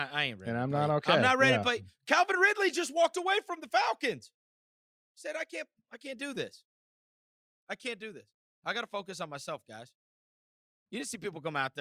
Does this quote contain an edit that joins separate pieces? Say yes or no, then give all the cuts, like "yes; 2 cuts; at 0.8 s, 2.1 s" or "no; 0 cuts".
no; 0 cuts